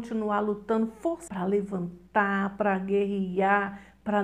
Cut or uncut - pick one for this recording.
cut